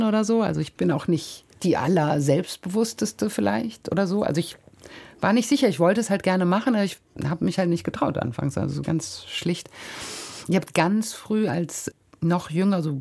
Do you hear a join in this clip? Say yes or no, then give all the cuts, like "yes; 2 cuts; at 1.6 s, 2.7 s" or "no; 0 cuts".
no; 0 cuts